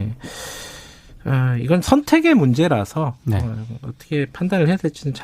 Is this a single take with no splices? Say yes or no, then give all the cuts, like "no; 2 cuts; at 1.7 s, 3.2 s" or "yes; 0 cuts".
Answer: no; 1 cut; at 1.8 s